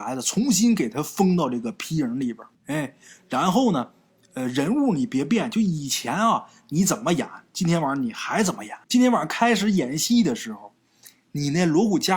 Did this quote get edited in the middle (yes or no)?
yes